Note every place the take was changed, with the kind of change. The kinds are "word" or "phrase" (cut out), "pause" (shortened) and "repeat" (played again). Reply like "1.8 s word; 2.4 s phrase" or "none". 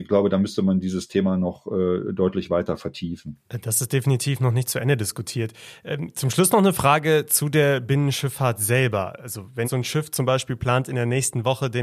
9.6 s word